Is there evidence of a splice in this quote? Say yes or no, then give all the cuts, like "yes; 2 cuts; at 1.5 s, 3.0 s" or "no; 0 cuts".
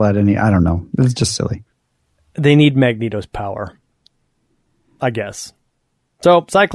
no; 0 cuts